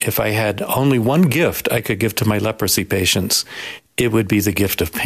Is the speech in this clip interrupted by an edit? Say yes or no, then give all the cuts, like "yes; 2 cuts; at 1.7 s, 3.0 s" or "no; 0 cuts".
no; 0 cuts